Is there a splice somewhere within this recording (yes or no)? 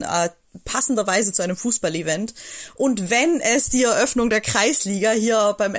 no